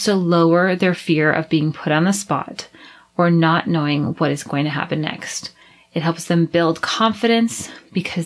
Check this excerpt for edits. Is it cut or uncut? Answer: uncut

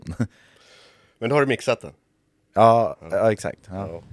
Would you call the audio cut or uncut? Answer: uncut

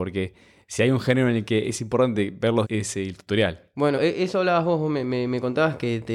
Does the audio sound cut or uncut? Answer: cut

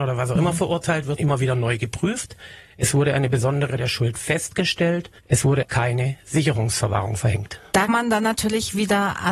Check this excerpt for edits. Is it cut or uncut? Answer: cut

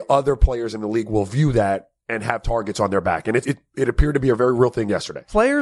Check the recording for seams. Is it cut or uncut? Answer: cut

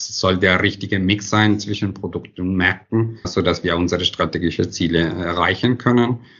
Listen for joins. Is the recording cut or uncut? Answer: cut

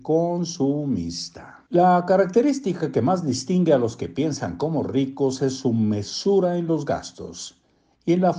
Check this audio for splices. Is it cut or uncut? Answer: cut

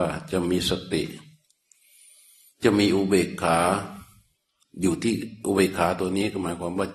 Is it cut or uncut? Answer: uncut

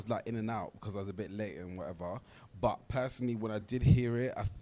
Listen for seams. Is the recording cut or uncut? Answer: uncut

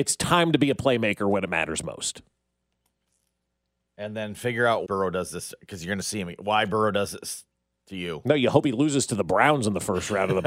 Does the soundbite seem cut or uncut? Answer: cut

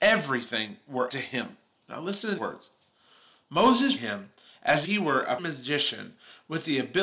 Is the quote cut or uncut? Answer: cut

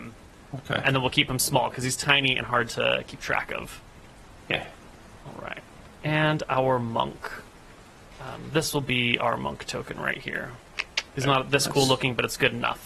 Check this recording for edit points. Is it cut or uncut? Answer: cut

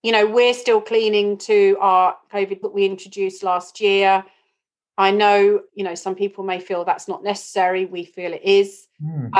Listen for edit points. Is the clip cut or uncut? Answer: cut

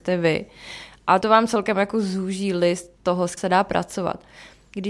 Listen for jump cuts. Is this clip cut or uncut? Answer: cut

